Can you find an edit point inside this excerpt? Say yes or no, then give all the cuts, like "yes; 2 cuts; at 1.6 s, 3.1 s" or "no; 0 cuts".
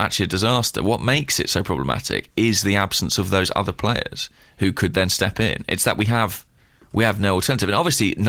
no; 0 cuts